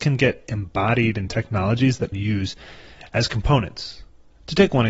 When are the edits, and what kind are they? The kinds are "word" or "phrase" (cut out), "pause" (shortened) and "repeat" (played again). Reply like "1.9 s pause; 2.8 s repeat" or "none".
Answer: 2.1 s phrase